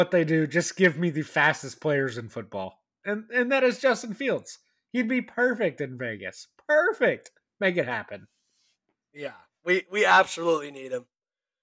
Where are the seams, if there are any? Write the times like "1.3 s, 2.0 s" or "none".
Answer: none